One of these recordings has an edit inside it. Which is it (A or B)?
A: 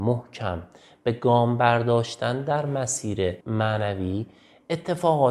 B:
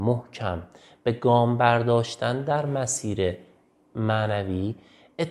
A